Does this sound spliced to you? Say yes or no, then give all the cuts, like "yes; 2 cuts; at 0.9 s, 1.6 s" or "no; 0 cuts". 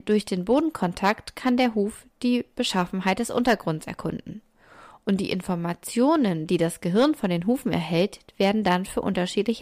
no; 0 cuts